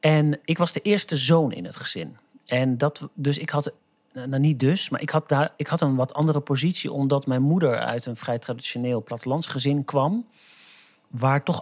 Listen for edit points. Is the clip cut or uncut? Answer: uncut